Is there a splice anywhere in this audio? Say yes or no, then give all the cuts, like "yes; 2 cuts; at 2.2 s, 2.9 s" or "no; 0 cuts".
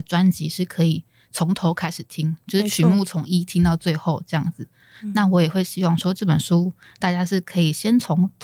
no; 0 cuts